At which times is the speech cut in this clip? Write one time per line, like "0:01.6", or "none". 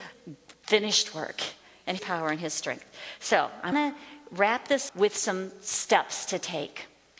0:02.0
0:03.7
0:04.9